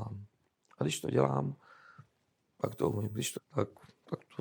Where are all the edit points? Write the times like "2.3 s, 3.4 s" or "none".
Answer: 3.4 s

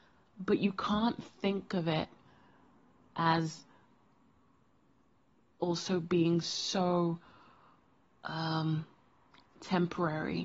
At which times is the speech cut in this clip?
none

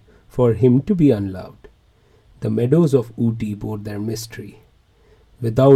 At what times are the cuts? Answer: none

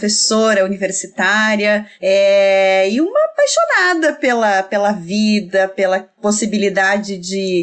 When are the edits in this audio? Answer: none

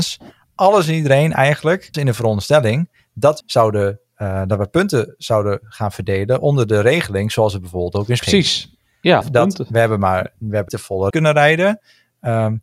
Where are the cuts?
1.9 s, 3.4 s, 8.2 s, 9.2 s, 10.7 s, 11.1 s

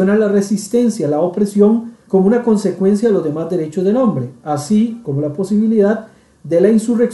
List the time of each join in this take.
2.0 s

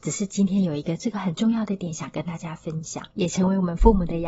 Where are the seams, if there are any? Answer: 3.1 s

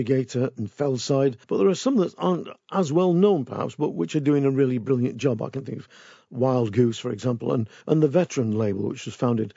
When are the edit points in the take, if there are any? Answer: 1.4 s

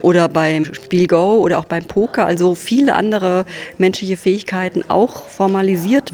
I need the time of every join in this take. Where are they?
none

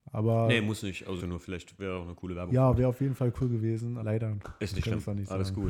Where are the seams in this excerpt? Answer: 1.2 s, 4.0 s

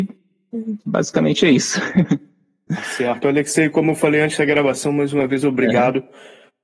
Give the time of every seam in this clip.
none

